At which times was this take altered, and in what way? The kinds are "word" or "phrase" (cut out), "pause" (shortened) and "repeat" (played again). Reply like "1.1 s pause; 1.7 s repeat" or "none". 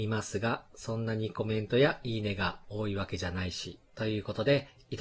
3.9 s pause